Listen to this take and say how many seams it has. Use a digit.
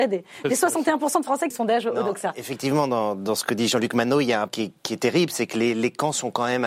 2